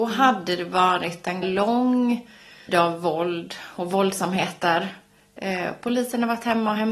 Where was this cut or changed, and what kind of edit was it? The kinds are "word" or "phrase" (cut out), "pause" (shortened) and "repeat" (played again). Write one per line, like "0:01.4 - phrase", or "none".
0:01.4 - word
0:02.7 - word